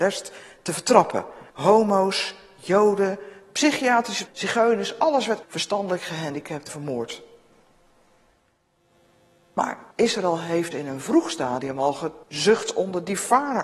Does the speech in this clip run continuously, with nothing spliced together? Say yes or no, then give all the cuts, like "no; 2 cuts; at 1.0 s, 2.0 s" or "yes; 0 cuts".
no; 7 cuts; at 1.5 s, 4.3 s, 5.4 s, 6.7 s, 9.9 s, 10.7 s, 12.2 s